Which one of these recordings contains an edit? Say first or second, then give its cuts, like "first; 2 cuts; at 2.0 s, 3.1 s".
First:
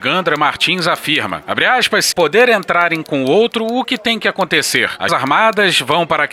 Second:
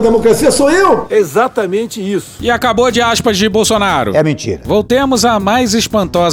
first; 3 cuts; at 2.1 s, 3.0 s, 5.1 s